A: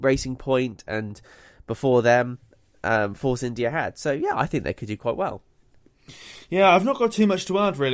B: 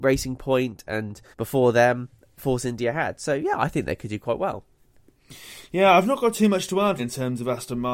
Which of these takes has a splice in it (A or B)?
B